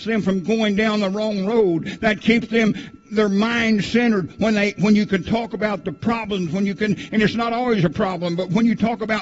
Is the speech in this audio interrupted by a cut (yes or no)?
no